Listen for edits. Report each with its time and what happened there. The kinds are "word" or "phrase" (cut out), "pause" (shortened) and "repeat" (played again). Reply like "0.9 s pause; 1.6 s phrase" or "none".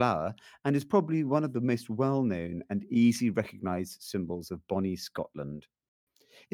none